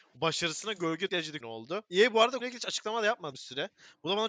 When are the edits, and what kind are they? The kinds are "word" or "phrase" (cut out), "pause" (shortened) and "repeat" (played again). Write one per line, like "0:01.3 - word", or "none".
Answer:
0:01.1 - word
0:01.4 - phrase
0:01.9 - pause
0:02.4 - word
0:03.3 - word